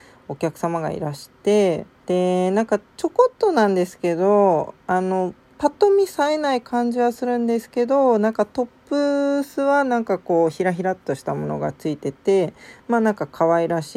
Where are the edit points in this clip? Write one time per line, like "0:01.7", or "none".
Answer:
0:02.0

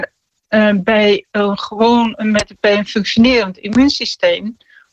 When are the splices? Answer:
none

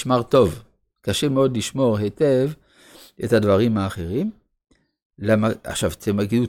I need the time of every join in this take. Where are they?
none

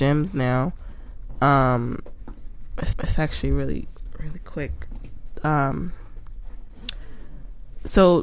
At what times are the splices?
0:02.9

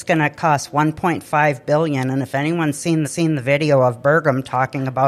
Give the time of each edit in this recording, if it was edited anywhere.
0:03.0

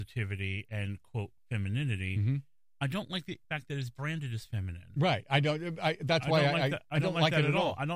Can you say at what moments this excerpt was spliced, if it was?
0:03.4

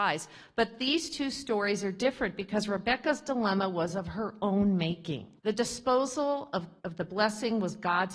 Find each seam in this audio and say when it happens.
0:05.4
0:06.8

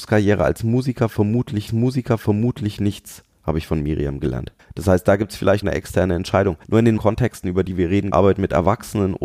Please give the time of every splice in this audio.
0:01.7
0:04.6
0:05.6
0:06.6
0:07.0
0:08.1

